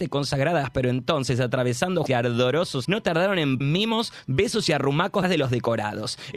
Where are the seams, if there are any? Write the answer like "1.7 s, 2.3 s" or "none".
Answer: 2.1 s, 2.8 s, 3.6 s, 5.2 s